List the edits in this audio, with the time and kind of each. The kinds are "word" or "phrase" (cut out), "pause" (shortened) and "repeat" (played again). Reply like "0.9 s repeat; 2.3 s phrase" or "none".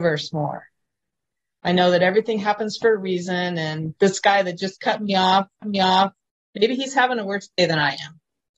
5.6 s repeat